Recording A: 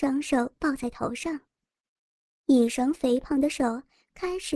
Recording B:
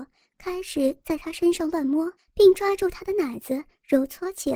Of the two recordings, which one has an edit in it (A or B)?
B